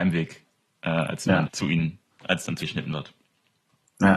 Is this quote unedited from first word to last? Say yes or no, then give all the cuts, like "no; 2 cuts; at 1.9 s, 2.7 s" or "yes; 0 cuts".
no; 3 cuts; at 1.5 s, 2.1 s, 2.6 s